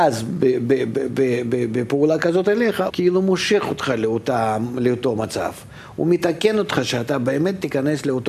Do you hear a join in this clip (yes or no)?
yes